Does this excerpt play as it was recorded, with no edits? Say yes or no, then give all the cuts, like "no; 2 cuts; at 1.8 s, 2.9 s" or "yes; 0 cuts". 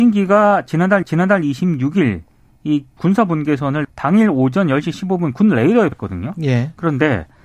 no; 4 cuts; at 1.0 s, 3.0 s, 3.8 s, 5.9 s